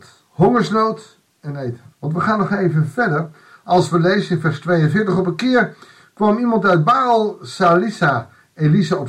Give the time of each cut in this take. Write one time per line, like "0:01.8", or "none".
0:01.9